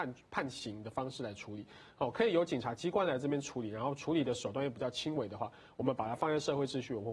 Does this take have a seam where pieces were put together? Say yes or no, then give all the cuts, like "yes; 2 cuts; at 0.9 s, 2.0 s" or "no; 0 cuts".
no; 0 cuts